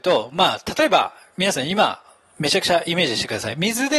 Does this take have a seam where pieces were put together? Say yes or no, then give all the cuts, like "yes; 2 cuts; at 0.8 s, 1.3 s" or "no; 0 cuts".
no; 0 cuts